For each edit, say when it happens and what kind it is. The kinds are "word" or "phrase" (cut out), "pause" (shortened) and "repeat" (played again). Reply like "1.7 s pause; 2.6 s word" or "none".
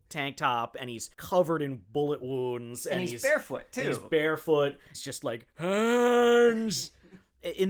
1.1 s pause; 4.9 s phrase